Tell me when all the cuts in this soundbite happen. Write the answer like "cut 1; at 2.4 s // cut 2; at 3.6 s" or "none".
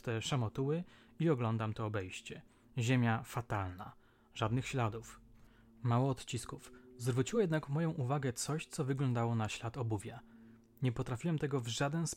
none